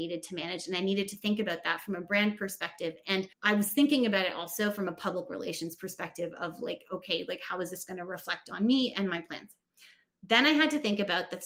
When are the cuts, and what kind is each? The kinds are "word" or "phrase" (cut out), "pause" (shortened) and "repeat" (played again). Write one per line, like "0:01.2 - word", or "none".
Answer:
0:03.3 - pause

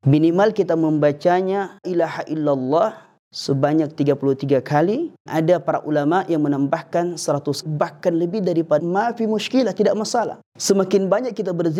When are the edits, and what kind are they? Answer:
0:01.8 - word
0:03.2 - pause
0:05.3 - word
0:07.6 - word
0:08.8 - word
0:10.5 - pause

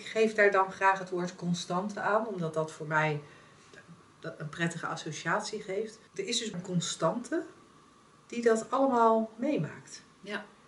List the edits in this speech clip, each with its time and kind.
0:06.1 - pause
0:06.5 - word

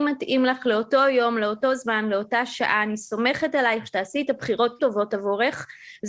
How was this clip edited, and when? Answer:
0:04.8 - word

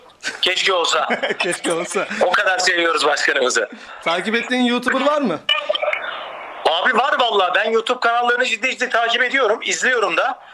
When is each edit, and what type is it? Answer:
none

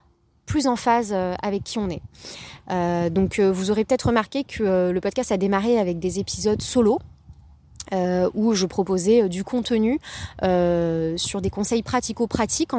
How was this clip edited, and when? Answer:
none

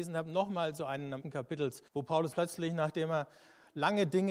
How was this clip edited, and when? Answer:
0:01.2 - phrase
0:01.9 - pause
0:02.3 - word

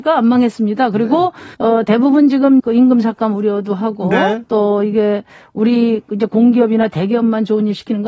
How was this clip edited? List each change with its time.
0:01.5 - pause
0:02.6 - phrase

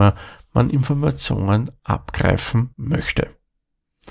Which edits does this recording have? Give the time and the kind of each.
0:02.7 - pause

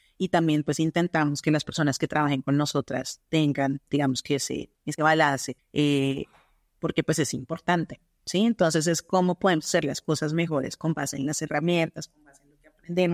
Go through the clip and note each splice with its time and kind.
0:04.7 - pause
0:05.6 - pause

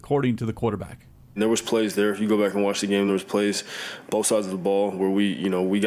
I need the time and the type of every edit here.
none

